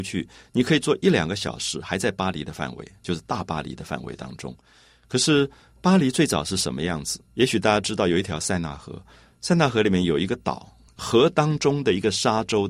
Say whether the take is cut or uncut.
cut